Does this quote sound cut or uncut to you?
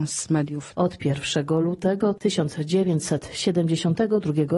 uncut